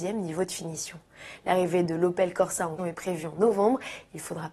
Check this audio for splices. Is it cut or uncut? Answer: cut